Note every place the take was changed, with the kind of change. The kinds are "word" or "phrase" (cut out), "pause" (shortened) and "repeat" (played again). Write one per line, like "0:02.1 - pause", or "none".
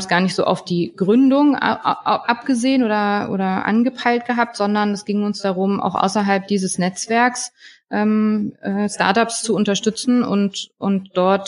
none